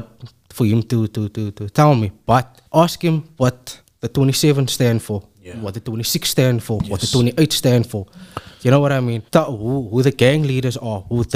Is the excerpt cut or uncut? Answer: cut